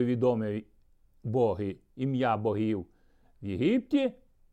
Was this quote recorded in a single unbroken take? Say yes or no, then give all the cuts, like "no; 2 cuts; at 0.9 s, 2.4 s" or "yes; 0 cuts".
yes; 0 cuts